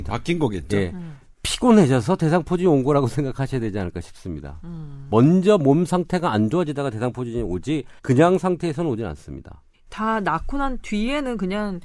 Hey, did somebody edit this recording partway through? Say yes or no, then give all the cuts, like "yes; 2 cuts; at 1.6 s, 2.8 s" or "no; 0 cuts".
yes; 2 cuts; at 8.0 s, 9.7 s